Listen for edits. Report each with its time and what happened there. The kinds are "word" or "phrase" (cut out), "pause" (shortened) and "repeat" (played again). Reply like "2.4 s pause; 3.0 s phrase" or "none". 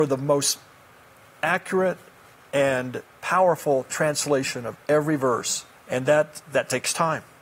5.7 s pause